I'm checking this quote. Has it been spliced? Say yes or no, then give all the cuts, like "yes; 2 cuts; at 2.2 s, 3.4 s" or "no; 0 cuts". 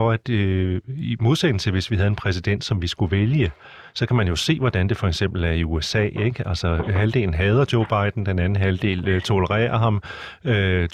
no; 0 cuts